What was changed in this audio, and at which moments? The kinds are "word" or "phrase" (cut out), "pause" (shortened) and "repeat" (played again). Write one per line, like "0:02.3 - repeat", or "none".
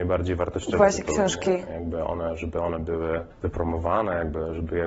0:03.3 - pause